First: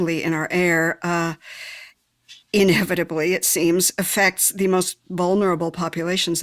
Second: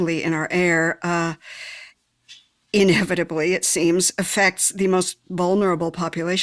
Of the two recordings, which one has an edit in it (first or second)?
first